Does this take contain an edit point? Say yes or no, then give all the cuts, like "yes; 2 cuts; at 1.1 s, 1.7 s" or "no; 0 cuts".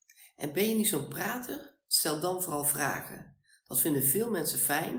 no; 0 cuts